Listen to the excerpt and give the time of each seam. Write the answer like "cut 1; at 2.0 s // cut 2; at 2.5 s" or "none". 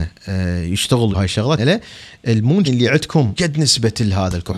cut 1; at 1.1 s // cut 2; at 1.6 s // cut 3; at 2.6 s // cut 4; at 3.4 s